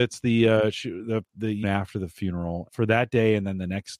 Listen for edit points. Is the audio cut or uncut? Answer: cut